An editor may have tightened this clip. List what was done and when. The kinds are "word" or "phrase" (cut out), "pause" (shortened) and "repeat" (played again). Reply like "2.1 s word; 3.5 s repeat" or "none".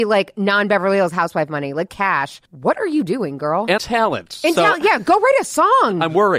1.9 s phrase; 2.5 s pause; 3.8 s word